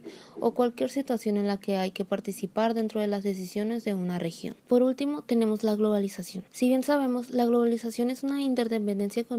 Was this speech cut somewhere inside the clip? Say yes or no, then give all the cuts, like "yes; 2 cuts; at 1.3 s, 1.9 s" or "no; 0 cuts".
yes; 2 cuts; at 4.6 s, 6.5 s